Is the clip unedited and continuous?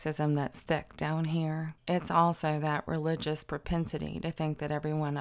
no; 1 cut; at 1.8 s

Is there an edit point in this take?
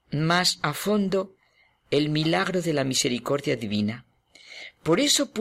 no; 0 cuts

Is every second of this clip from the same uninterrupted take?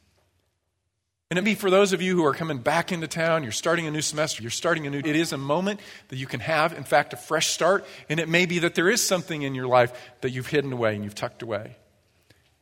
no; 3 cuts; at 1.4 s, 4.4 s, 5.0 s

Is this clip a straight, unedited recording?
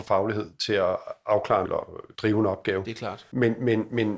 no; 2 cuts; at 1.6 s, 2.1 s

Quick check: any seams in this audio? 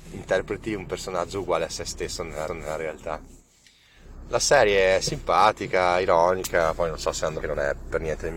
yes; 2 cuts; at 2.5 s, 7.4 s

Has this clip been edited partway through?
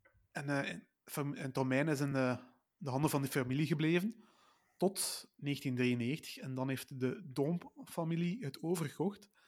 no; 0 cuts

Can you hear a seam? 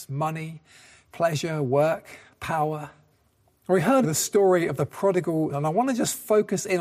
yes; 3 cuts; at 3.1 s, 4.0 s, 5.5 s

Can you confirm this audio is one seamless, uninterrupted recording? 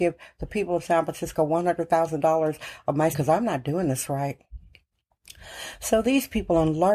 no; 1 cut; at 3.1 s

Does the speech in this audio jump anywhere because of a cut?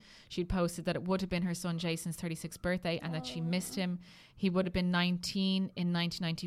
no; 0 cuts

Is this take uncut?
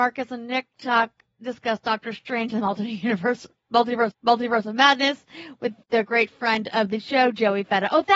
no; 2 cuts; at 4.1 s, 5.8 s

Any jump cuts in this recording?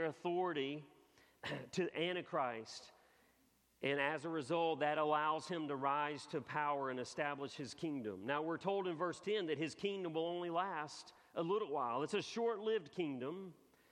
no; 0 cuts

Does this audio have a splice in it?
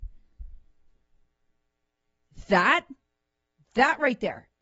no; 0 cuts

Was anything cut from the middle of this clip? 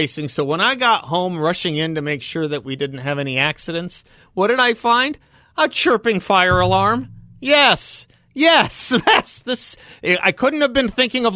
no; 0 cuts

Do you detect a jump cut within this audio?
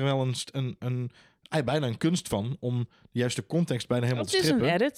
no; 0 cuts

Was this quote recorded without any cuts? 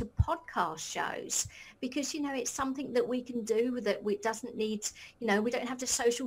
yes; 0 cuts

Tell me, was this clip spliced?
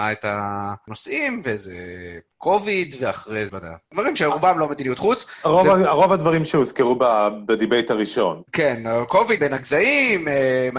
yes; 5 cuts; at 2.3 s, 3.5 s, 3.8 s, 8.5 s, 9.4 s

